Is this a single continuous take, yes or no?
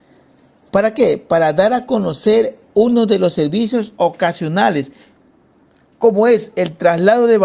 yes